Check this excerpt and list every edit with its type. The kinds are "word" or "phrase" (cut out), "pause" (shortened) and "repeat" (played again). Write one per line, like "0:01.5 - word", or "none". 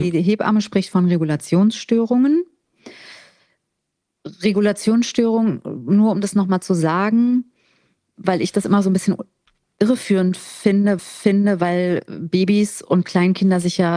0:11.0 - repeat

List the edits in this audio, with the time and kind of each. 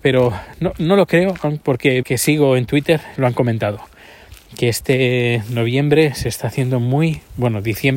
0:02.0 - phrase
0:03.2 - word

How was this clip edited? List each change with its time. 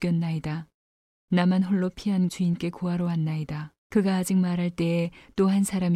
0:02.3 - word
0:03.8 - pause

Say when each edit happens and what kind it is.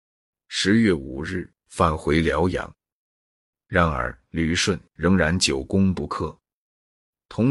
none

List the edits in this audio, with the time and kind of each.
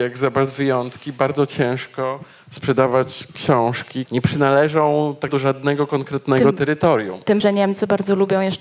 0:04.1 - word
0:05.3 - word
0:07.4 - word

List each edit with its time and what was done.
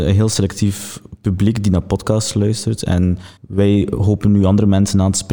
0:03.4 - pause

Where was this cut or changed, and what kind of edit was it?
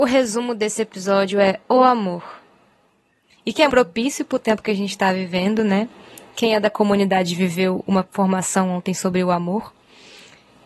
0:03.7 - word

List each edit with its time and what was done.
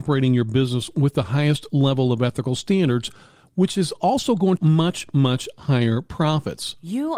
0:04.6 - phrase

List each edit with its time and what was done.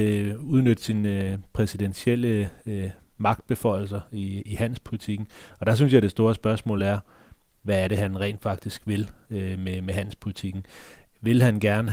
none

